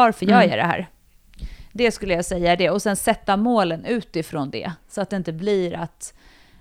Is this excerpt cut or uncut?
uncut